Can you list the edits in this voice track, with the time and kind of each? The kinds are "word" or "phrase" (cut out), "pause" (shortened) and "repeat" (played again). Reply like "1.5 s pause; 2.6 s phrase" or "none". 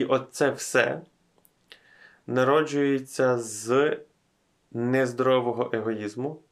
none